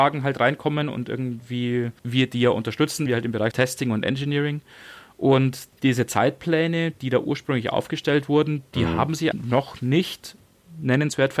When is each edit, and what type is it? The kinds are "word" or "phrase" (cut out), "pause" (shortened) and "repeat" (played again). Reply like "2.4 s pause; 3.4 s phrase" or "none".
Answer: 3.1 s word; 3.5 s word; 5.7 s pause; 9.3 s word